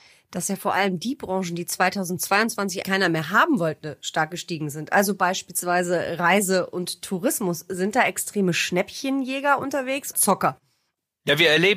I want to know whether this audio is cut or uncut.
cut